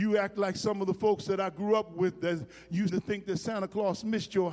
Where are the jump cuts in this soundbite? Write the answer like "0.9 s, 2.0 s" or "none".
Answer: 2.9 s